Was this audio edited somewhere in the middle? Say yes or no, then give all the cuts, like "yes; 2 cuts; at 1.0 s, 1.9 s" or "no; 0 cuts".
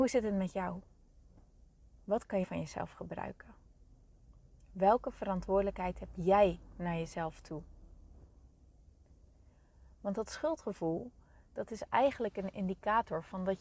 yes; 1 cut; at 2.4 s